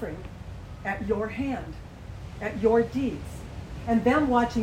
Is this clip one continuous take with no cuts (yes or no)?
yes